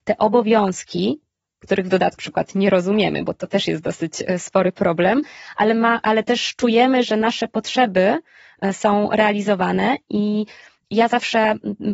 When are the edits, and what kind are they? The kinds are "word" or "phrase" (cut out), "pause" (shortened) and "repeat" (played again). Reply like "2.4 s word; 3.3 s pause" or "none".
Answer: 2.2 s word